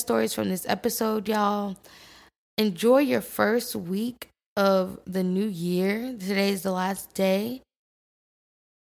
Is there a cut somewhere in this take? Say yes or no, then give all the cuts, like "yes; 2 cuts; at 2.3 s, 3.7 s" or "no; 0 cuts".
no; 0 cuts